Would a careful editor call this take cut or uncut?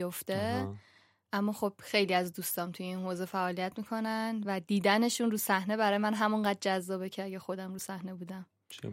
uncut